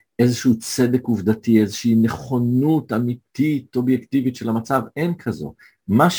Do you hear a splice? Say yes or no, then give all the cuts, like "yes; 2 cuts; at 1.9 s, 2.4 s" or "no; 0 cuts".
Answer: no; 0 cuts